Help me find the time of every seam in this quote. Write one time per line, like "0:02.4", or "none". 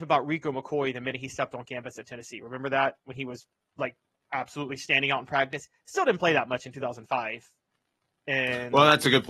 none